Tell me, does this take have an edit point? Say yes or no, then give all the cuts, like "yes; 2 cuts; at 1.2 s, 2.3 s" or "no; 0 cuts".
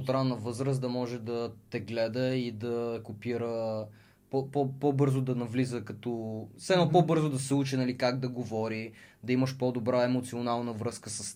no; 0 cuts